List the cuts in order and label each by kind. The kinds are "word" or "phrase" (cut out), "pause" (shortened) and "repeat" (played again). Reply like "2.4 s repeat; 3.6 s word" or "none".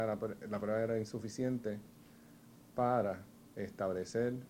none